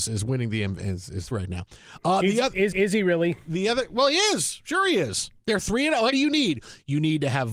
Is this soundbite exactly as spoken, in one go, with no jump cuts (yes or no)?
no